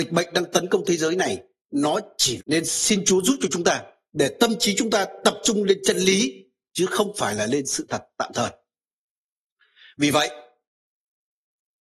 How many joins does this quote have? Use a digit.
1